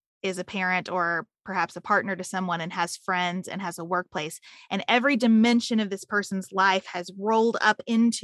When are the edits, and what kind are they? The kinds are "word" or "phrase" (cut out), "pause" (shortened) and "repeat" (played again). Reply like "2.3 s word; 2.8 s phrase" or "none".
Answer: none

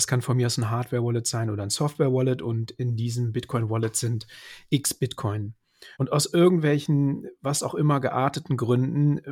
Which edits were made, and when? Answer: 5.9 s pause

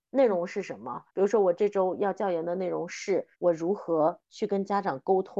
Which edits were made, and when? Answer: 1.1 s pause; 3.3 s pause

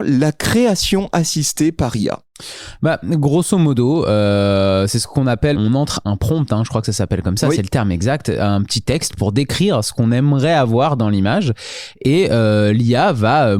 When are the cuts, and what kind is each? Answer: 5.5 s word

